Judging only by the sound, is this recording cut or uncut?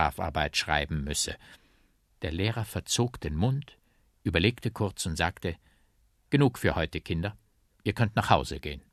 uncut